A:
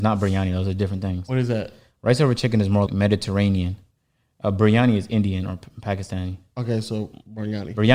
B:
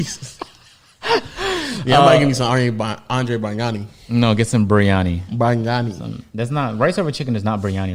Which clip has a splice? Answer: A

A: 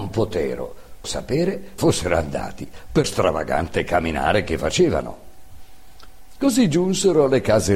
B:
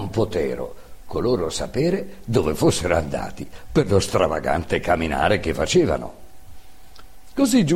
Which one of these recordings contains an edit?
A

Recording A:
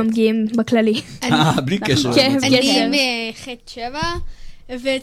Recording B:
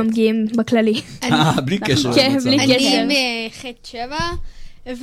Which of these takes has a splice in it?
A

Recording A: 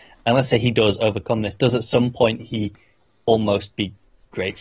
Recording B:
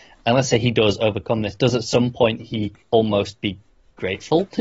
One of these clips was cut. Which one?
B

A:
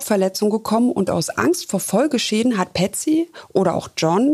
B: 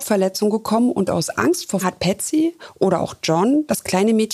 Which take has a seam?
B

